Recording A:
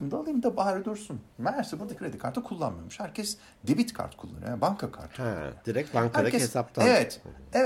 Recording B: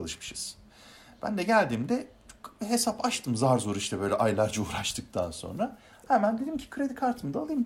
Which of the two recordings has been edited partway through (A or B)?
A